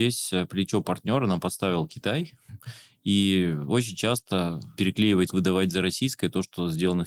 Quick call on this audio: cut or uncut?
cut